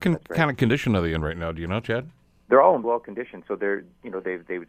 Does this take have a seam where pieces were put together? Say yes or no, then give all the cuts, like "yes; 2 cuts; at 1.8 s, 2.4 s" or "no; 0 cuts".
yes; 1 cut; at 2.8 s